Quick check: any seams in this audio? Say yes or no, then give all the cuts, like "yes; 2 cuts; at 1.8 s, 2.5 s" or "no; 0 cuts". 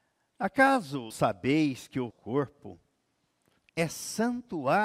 yes; 2 cuts; at 1.1 s, 2.1 s